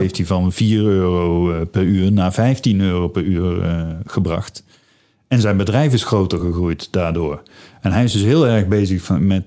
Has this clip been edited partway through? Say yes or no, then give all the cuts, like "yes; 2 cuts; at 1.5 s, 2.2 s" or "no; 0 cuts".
no; 0 cuts